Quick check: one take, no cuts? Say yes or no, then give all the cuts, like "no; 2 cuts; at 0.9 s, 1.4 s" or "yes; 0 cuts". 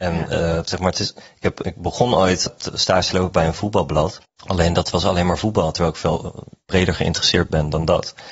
no; 3 cuts; at 1.2 s, 2.5 s, 4.2 s